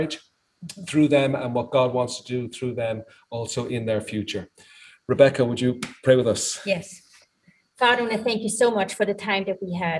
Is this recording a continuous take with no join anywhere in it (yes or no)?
yes